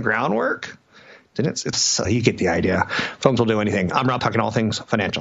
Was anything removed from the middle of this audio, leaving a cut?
yes; 4 cuts; at 1.7 s, 2.0 s, 3.4 s, 4.2 s

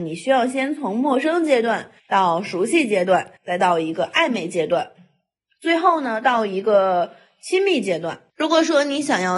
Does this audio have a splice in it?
yes; 3 cuts; at 2.0 s, 3.4 s, 8.3 s

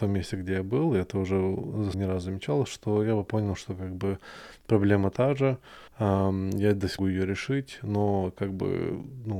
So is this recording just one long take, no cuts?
no; 4 cuts; at 1.9 s, 3.3 s, 5.9 s, 7.0 s

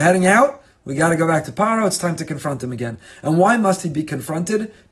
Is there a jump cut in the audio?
no; 0 cuts

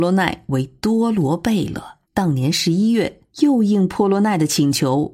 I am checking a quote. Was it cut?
yes; 2 cuts; at 2.0 s, 3.3 s

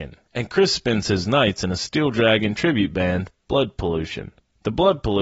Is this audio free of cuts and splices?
yes; 0 cuts

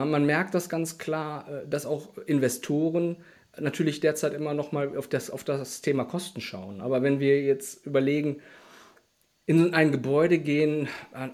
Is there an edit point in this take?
no; 0 cuts

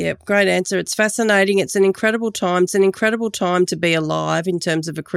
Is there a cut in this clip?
yes; 1 cut; at 2.7 s

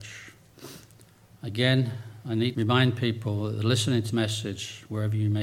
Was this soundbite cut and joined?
yes; 2 cuts; at 2.5 s, 4.1 s

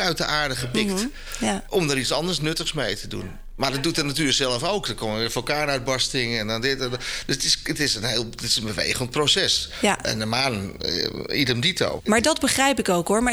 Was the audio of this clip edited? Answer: no; 0 cuts

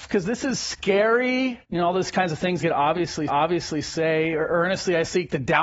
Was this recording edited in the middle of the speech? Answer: yes; 3 cuts; at 1.6 s, 2.6 s, 3.3 s

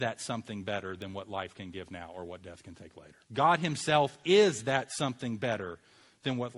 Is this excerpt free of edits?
no; 1 cut; at 3.2 s

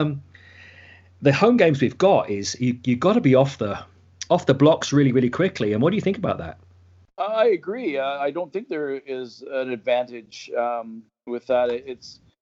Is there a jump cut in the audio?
yes; 1 cut; at 4.3 s

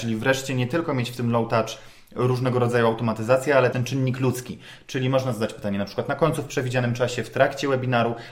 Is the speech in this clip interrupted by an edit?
yes; 1 cut; at 3.7 s

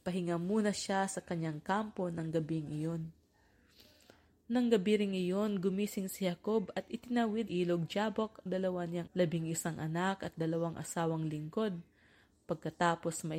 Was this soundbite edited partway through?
yes; 3 cuts; at 7.5 s, 8.5 s, 9.1 s

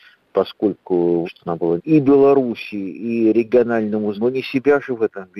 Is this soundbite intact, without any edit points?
no; 3 cuts; at 1.2 s, 1.8 s, 4.1 s

